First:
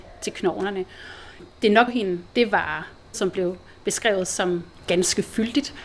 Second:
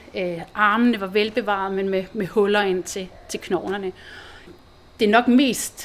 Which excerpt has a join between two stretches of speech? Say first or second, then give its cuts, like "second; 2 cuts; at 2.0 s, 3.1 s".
first; 4 cuts; at 1.5 s, 1.9 s, 2.3 s, 3.1 s